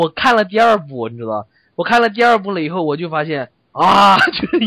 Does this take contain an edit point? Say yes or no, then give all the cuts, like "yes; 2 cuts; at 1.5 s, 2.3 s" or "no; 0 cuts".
no; 0 cuts